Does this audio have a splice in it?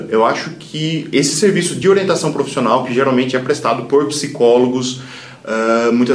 no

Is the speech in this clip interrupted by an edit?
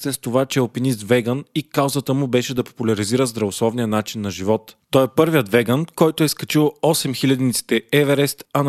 no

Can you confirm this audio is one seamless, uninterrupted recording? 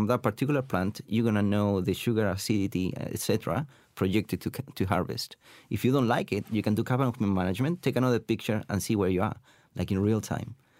yes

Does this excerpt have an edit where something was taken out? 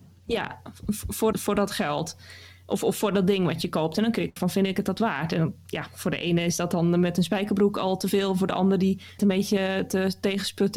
yes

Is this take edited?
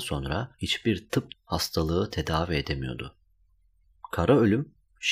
yes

